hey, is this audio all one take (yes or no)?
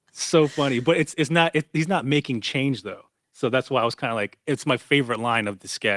yes